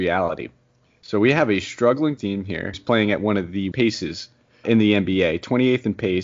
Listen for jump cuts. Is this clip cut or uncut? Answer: cut